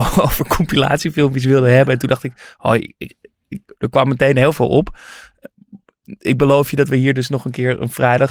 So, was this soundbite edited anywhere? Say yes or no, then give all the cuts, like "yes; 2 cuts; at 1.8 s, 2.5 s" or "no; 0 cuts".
no; 0 cuts